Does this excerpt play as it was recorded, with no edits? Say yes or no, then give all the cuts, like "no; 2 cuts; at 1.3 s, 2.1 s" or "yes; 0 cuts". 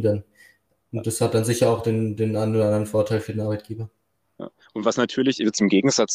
yes; 0 cuts